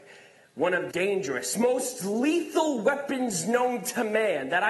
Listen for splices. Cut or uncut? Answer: cut